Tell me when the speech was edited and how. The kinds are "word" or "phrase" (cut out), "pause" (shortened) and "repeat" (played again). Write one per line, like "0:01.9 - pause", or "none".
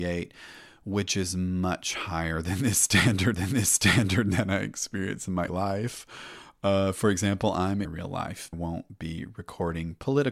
0:03.3 - repeat
0:05.5 - word
0:07.8 - phrase
0:08.5 - phrase